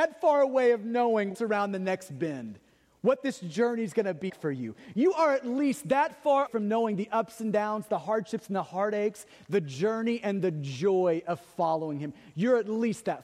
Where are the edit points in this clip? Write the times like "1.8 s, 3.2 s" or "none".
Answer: 1.3 s, 4.3 s, 6.5 s